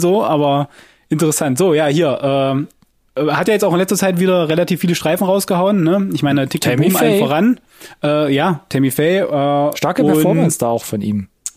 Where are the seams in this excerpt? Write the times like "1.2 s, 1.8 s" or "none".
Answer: none